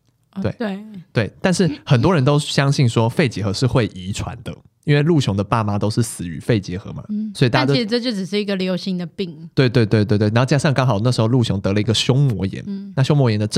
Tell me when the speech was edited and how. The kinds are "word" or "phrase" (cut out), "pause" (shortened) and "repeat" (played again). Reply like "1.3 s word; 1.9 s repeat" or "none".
none